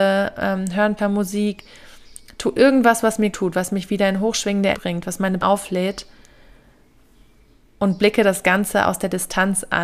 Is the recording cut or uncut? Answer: cut